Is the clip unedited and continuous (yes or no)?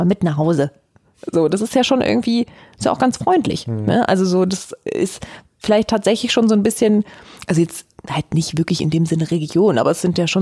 yes